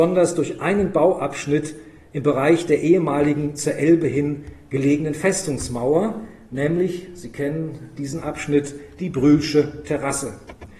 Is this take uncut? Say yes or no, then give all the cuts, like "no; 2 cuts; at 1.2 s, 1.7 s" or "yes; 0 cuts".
yes; 0 cuts